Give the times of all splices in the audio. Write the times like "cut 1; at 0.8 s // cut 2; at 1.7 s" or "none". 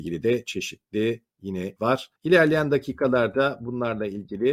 cut 1; at 1.8 s // cut 2; at 2.2 s